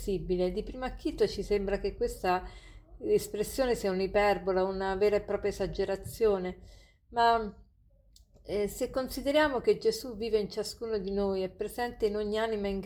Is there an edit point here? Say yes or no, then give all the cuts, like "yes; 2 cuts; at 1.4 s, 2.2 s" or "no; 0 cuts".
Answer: no; 0 cuts